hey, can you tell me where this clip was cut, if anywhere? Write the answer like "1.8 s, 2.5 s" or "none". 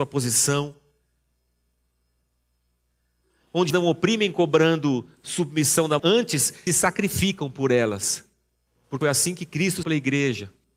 3.7 s, 6.0 s, 6.7 s, 9.0 s, 9.8 s